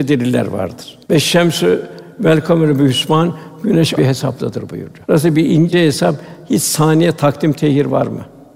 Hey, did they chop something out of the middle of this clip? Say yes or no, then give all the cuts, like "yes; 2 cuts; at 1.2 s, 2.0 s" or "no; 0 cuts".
yes; 3 cuts; at 1.0 s, 4.0 s, 5.0 s